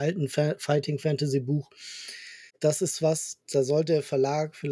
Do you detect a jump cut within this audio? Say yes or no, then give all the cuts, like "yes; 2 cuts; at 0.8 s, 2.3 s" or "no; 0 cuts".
yes; 2 cuts; at 2.5 s, 3.4 s